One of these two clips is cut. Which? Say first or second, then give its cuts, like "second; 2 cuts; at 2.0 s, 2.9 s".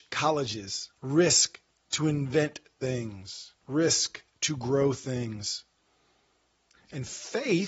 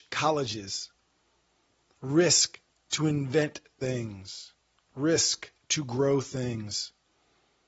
first; 2 cuts; at 0.9 s, 3.6 s